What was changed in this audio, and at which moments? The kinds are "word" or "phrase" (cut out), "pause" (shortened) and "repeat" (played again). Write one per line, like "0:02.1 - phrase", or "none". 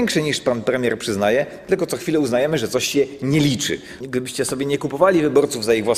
none